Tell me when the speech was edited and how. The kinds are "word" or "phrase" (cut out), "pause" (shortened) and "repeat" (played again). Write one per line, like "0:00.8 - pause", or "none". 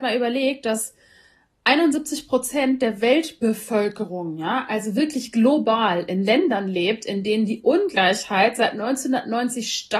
none